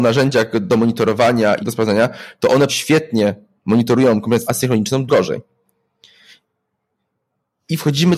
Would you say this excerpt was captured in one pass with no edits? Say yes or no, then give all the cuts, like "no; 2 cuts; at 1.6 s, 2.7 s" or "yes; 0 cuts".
no; 4 cuts; at 1.6 s, 2.7 s, 4.4 s, 5.1 s